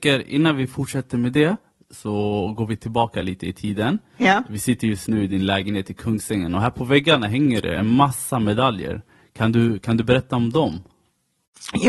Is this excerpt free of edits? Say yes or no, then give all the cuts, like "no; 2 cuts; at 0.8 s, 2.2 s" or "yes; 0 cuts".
yes; 0 cuts